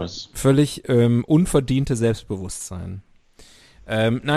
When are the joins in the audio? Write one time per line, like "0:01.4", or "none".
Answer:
none